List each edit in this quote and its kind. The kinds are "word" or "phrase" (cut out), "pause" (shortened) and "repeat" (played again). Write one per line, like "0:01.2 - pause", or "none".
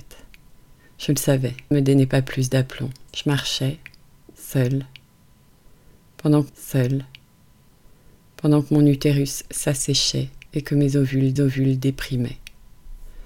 0:01.7 - phrase
0:03.1 - pause
0:06.5 - repeat
0:10.5 - pause
0:11.4 - repeat